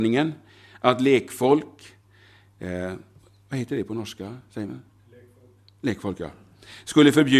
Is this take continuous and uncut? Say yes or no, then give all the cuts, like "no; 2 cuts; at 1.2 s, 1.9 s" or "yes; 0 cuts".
yes; 0 cuts